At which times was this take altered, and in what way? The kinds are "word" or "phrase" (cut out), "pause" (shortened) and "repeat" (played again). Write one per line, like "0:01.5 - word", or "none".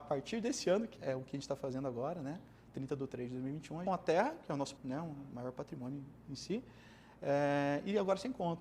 0:01.0 - word
0:03.9 - phrase
0:04.8 - word

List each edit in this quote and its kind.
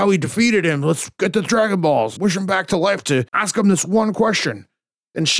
0:02.2 - word
0:03.3 - pause

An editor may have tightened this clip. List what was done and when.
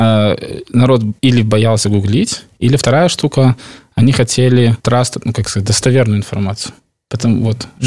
0:01.2 - pause
0:04.8 - pause

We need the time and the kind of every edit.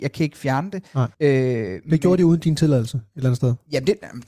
0:01.1 - pause

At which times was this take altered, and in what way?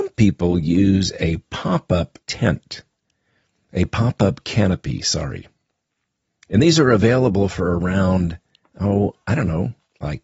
0:02.2 - pause
0:08.6 - pause

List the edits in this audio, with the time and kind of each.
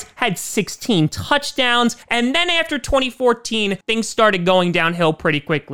0:02.0 - pause
0:03.8 - pause

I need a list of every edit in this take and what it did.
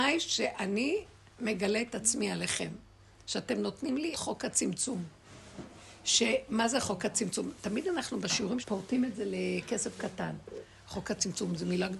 0:04.1 - word
0:08.6 - word

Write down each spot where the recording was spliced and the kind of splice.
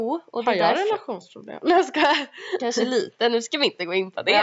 none

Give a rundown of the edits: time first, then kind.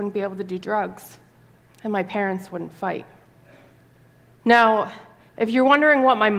none

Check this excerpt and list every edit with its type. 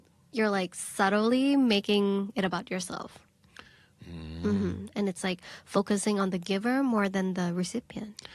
none

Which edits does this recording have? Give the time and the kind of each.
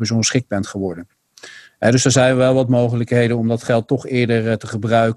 none

